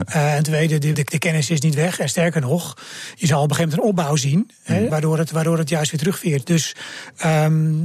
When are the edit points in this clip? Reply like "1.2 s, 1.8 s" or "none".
0.9 s, 4.9 s